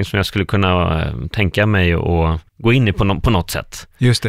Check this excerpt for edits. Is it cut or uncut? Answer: cut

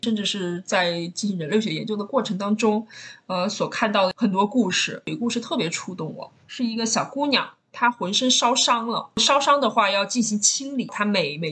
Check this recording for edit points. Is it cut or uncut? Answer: cut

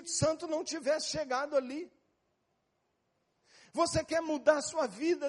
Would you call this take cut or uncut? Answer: uncut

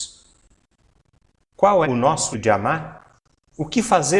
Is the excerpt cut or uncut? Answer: cut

